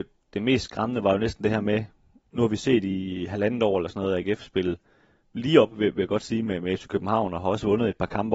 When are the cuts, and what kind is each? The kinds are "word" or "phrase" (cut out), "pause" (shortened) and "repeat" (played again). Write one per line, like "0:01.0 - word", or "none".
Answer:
none